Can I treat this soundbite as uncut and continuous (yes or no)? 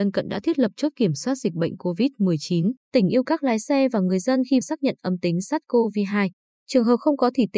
no